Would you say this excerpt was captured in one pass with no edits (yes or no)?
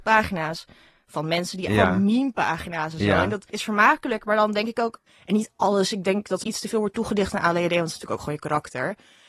no